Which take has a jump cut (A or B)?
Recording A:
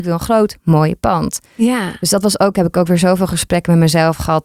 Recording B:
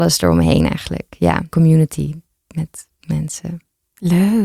B